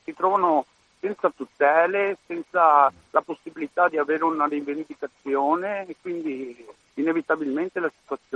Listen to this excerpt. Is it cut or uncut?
cut